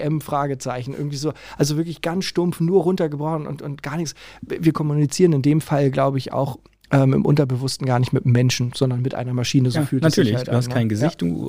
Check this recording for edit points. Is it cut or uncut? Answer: uncut